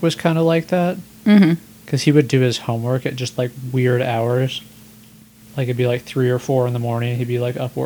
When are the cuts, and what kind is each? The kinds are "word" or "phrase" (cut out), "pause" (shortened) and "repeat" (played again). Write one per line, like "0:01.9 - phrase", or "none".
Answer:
none